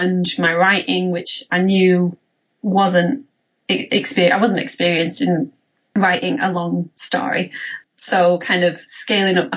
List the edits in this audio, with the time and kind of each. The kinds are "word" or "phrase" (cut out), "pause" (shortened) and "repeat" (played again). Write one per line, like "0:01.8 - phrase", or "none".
none